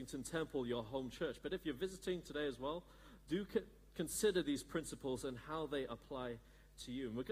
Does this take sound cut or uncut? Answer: uncut